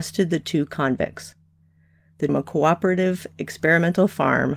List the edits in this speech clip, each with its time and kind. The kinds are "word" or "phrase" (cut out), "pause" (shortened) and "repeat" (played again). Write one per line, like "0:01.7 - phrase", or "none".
0:02.3 - phrase